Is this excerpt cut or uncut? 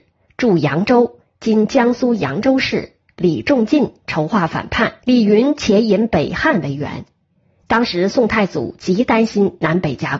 cut